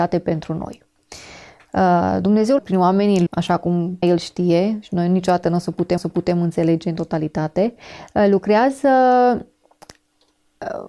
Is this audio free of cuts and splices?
no; 4 cuts; at 2.6 s, 3.3 s, 4.0 s, 6.0 s

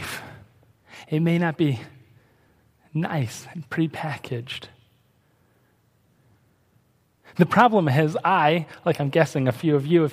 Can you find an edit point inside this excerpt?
no; 0 cuts

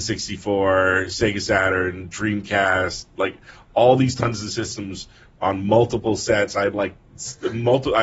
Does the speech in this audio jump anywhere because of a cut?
no; 0 cuts

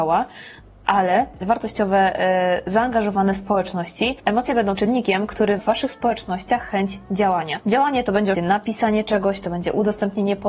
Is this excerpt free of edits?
no; 4 cuts; at 1.4 s, 4.8 s, 5.6 s, 8.3 s

